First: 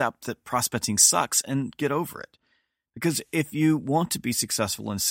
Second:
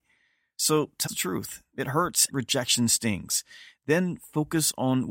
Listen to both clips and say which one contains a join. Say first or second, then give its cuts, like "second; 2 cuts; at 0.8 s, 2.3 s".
second; 2 cuts; at 1.1 s, 2.3 s